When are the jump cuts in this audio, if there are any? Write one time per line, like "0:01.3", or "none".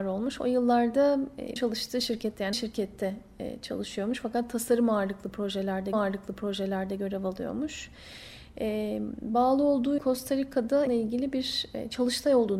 0:01.6
0:02.5
0:05.9
0:10.0
0:10.9